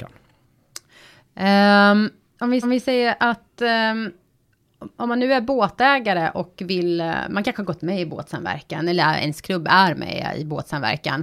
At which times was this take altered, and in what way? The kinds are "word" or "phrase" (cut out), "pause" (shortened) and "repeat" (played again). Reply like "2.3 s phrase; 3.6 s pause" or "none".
2.3 s pause; 2.6 s repeat